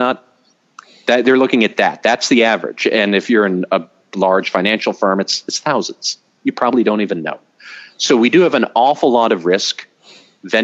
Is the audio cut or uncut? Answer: uncut